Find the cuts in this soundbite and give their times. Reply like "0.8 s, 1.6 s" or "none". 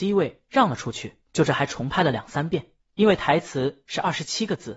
1.2 s